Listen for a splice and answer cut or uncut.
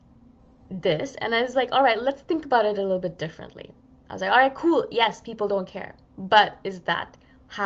uncut